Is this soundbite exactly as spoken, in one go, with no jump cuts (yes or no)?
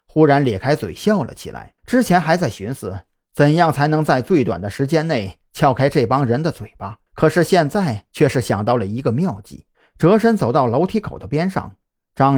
no